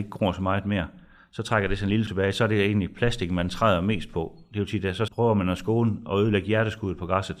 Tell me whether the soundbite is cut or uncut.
cut